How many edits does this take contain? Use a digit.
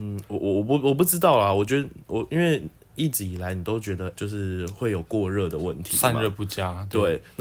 1